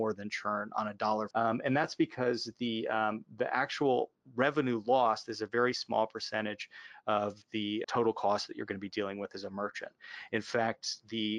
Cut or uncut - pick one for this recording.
cut